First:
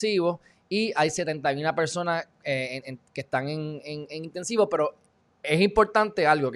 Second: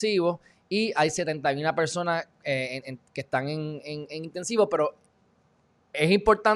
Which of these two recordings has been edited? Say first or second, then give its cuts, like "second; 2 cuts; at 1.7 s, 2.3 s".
first; 1 cut; at 5.2 s